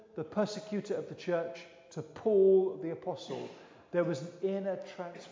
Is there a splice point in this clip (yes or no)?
no